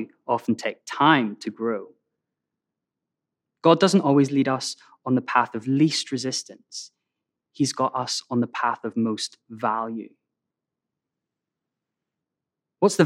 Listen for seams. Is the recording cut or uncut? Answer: uncut